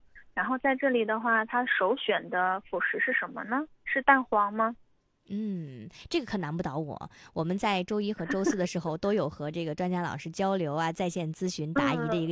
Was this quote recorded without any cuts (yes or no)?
yes